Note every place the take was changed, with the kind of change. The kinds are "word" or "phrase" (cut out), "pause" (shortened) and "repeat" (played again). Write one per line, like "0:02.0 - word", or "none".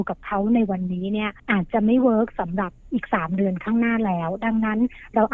0:01.4 - pause